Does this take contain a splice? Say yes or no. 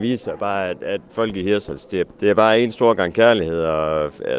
yes